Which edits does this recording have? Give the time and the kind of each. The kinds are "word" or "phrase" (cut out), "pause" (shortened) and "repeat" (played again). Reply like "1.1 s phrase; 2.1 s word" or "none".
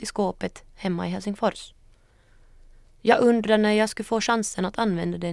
none

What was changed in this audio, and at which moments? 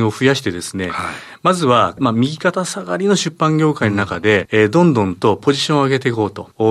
none

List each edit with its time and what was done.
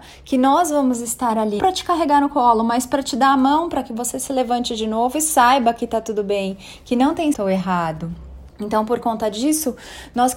1.6 s word; 7.3 s word; 8.5 s pause

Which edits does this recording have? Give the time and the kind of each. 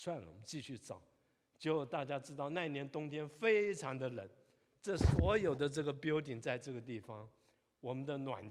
none

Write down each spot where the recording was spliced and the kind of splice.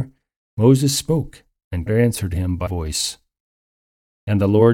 1.9 s word; 2.7 s word

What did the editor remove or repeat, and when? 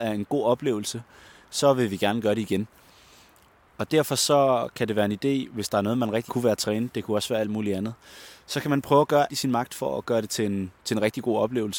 6.3 s phrase; 9.3 s word

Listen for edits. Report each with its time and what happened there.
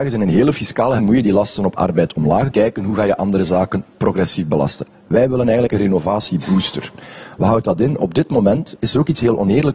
1.0 s word; 2.5 s phrase

